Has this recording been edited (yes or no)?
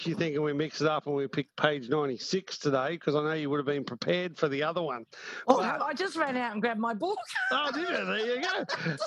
no